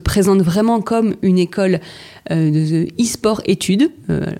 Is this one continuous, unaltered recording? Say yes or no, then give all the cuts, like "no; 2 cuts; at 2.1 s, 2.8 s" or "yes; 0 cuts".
yes; 0 cuts